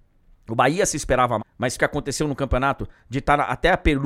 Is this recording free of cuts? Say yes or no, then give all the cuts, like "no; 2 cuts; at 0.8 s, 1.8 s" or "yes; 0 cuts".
no; 2 cuts; at 1.4 s, 1.8 s